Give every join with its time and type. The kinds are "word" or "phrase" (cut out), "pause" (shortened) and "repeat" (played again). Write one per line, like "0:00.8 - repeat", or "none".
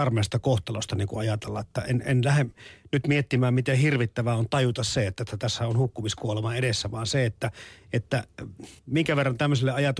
0:08.8 - pause